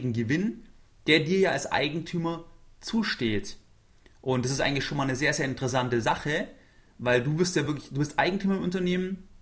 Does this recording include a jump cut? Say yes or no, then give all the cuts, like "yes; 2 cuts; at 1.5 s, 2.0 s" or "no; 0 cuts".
no; 0 cuts